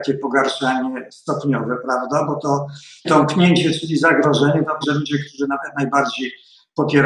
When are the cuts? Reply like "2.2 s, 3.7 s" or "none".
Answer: 3.0 s, 4.8 s

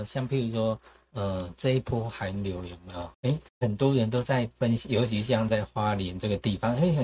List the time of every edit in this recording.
3.1 s, 3.5 s

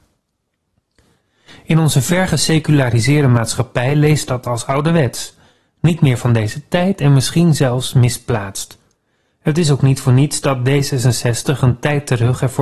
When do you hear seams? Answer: none

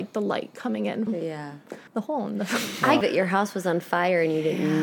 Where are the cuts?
1.1 s, 1.9 s, 3.0 s

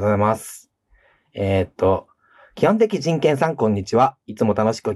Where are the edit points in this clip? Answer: none

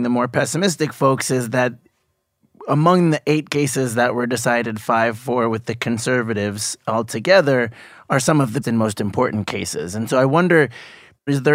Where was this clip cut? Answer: 8.6 s

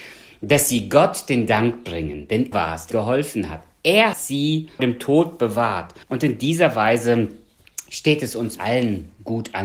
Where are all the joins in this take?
2.5 s, 2.9 s, 4.1 s, 4.8 s, 6.0 s, 8.6 s

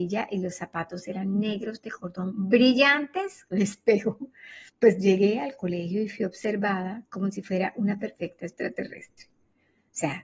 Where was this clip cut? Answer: 3.5 s, 4.7 s

